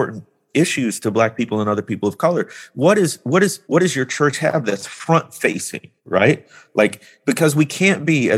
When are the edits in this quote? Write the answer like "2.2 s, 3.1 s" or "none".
3.6 s, 6.0 s